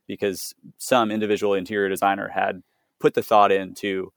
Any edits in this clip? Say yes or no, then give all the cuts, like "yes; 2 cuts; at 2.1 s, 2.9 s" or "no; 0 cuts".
no; 0 cuts